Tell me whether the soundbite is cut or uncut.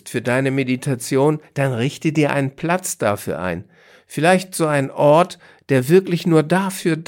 uncut